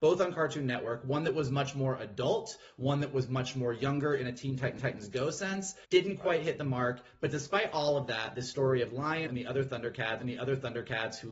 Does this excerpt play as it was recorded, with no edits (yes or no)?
no